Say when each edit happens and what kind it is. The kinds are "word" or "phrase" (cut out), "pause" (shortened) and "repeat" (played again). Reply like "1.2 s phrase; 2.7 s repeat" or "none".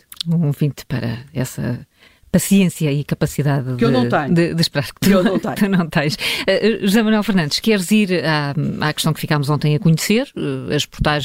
none